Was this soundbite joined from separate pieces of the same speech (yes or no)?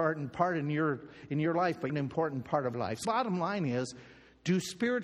yes